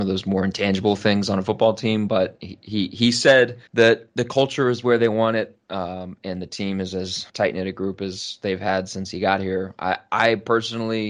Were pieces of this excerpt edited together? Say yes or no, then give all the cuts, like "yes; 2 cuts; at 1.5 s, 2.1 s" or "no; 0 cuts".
yes; 2 cuts; at 3.7 s, 7.3 s